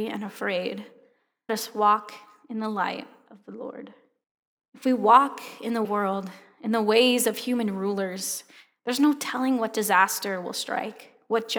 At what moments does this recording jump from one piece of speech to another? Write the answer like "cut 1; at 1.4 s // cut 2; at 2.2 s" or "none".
cut 1; at 1.5 s // cut 2; at 4.2 s // cut 3; at 5.8 s